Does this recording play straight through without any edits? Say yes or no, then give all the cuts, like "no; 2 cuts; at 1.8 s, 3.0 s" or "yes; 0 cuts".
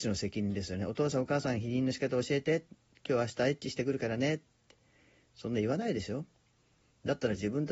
yes; 0 cuts